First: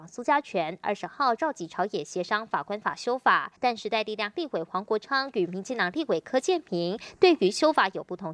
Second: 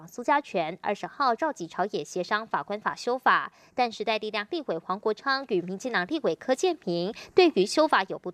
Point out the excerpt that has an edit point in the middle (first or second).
first